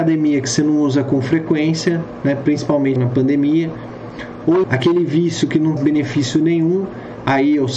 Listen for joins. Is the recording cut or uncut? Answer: cut